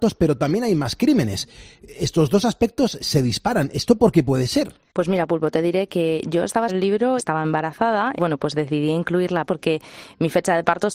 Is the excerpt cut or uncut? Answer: cut